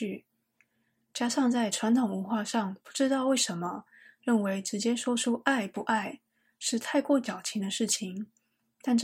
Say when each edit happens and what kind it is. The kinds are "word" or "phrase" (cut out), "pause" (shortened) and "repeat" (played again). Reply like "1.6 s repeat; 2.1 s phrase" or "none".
none